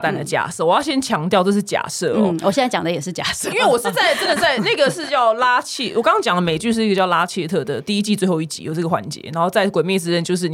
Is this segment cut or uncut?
cut